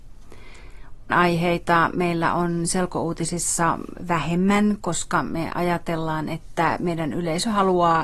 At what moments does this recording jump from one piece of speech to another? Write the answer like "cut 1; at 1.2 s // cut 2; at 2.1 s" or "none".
cut 1; at 1.1 s